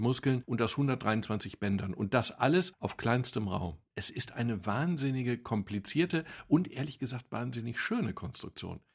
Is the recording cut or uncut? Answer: uncut